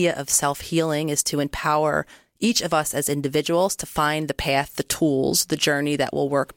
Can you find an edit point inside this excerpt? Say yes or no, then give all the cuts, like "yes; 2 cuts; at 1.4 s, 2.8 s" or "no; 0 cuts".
no; 0 cuts